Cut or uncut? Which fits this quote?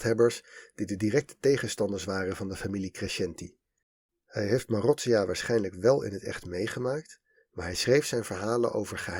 uncut